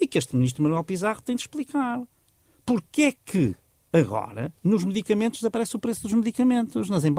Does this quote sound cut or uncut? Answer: uncut